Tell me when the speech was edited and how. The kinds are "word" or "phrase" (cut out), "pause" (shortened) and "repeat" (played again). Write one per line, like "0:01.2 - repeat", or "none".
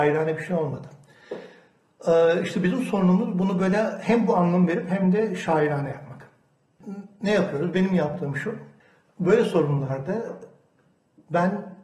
0:08.8 - pause

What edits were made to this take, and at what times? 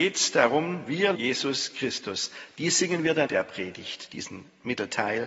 0:01.2 - word
0:03.3 - word

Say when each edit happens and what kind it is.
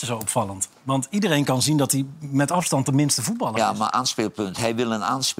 none

